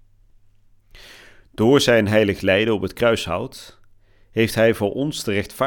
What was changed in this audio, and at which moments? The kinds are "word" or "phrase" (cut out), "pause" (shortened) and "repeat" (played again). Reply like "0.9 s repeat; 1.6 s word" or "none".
none